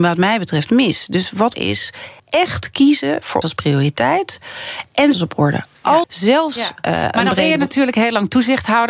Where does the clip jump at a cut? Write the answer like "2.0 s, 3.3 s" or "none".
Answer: 1.5 s, 2.2 s, 3.4 s, 5.1 s, 6.0 s